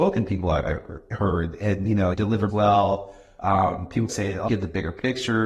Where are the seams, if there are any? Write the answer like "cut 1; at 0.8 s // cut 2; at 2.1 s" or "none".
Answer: cut 1; at 2.1 s // cut 2; at 2.5 s // cut 3; at 4.1 s // cut 4; at 4.5 s